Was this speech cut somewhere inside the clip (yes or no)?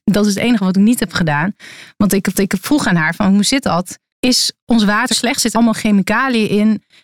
yes